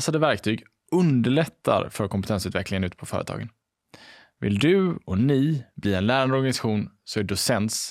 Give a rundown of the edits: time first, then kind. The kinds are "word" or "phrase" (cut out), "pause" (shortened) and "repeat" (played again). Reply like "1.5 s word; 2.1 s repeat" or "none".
none